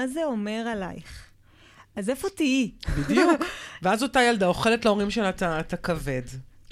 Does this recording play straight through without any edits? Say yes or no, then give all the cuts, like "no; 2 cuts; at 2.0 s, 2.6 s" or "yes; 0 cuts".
yes; 0 cuts